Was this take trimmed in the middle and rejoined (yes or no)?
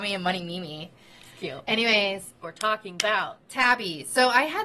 yes